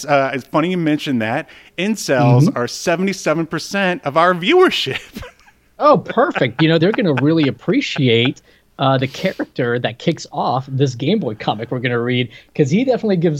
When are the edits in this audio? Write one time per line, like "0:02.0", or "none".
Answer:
0:06.8